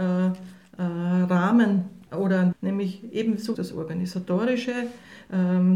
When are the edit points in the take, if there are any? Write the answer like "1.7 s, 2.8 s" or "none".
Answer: 2.1 s, 2.5 s, 3.5 s